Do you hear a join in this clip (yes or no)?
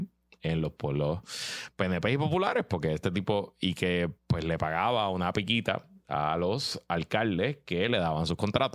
yes